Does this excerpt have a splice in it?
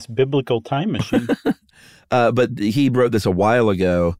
no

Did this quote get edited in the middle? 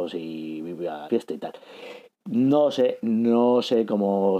yes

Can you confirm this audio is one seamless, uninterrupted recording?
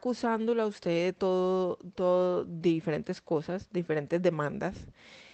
yes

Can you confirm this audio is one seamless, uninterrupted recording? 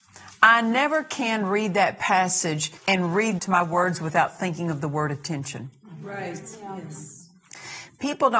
no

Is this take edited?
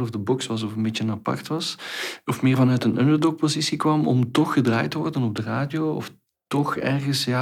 no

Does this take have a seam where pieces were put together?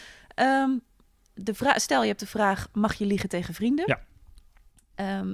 no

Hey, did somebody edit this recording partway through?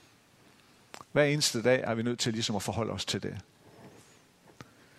yes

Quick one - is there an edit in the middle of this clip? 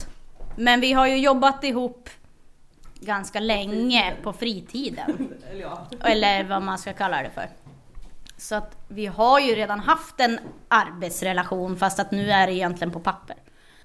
no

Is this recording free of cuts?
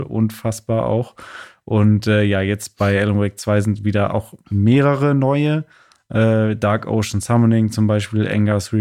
yes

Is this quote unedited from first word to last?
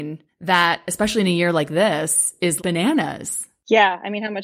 yes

